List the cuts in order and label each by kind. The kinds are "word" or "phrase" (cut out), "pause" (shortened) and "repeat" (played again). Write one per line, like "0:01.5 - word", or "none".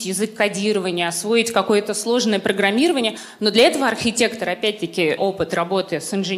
0:05.2 - word